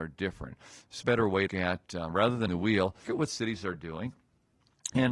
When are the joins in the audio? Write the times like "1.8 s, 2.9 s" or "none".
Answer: 1.0 s, 1.5 s, 2.5 s, 3.0 s